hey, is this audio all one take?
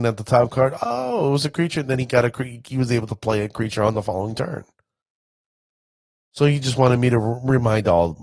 yes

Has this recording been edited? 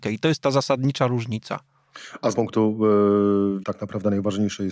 yes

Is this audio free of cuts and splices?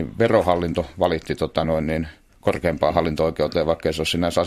yes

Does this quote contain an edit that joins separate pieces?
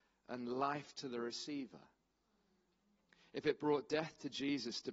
no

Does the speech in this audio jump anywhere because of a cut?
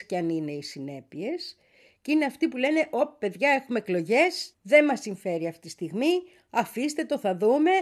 yes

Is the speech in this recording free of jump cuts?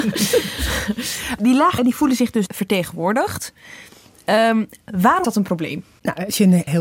no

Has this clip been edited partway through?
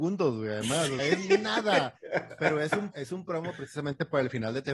yes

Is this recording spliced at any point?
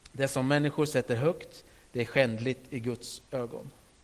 no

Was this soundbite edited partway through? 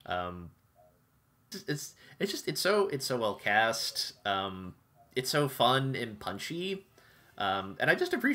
yes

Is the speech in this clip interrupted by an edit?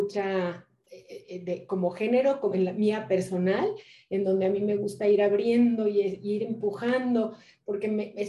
no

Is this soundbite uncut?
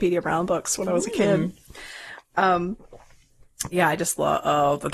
no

